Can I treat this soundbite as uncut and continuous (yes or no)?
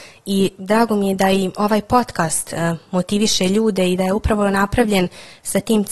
yes